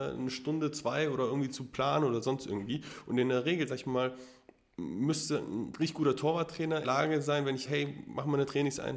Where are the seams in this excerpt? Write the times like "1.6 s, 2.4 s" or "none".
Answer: 6.8 s, 7.7 s